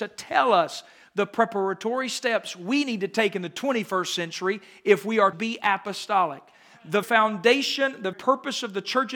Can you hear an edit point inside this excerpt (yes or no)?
yes